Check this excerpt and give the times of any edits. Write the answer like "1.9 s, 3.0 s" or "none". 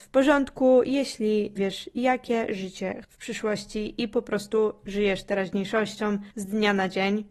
1.6 s, 3.0 s, 6.3 s